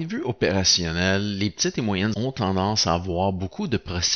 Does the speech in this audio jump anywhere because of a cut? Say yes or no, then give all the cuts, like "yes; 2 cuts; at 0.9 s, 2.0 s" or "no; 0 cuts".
yes; 1 cut; at 2.1 s